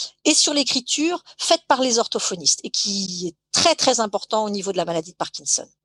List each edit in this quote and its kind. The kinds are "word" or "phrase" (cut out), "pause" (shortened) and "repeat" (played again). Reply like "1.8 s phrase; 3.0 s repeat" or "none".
none